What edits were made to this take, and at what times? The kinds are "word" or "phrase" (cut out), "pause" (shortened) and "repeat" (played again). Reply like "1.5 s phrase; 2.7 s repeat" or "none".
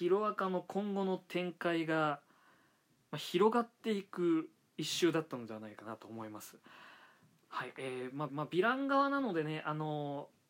8.3 s repeat